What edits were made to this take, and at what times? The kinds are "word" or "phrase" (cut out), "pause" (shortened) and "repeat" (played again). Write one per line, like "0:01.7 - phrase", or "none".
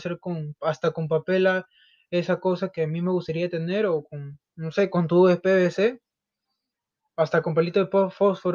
none